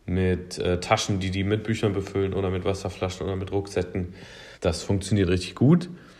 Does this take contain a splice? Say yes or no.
yes